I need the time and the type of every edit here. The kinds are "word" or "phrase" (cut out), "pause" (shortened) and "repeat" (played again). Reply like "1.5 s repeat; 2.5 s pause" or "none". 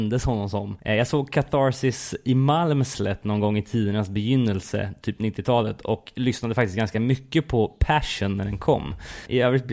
none